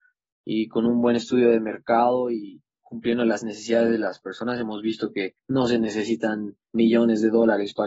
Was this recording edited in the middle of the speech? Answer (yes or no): yes